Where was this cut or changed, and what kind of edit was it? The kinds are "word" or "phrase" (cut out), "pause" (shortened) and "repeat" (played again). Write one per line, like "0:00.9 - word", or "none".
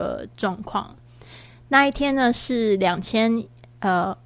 none